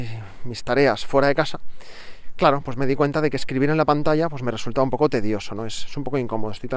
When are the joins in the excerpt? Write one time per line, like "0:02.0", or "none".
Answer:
none